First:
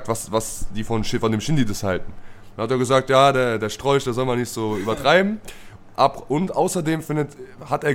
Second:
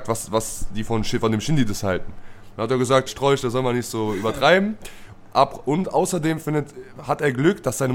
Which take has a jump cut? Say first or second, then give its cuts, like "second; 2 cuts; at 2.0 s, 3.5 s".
second; 1 cut; at 3.1 s